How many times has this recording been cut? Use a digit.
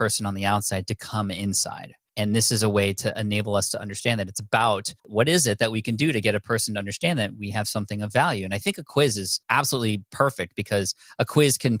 3